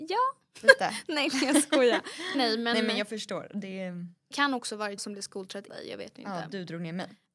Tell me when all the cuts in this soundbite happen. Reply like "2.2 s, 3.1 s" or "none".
2.3 s, 4.3 s, 5.0 s, 5.7 s